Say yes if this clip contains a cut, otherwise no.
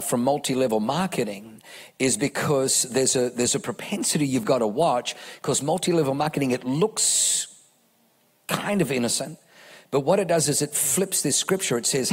no